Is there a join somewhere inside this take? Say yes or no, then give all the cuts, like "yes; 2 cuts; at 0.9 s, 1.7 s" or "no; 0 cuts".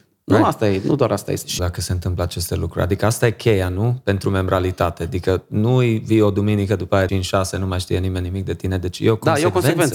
yes; 2 cuts; at 1.6 s, 7.1 s